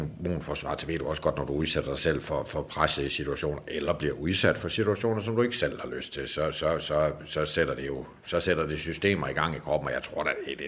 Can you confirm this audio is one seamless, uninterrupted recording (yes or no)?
yes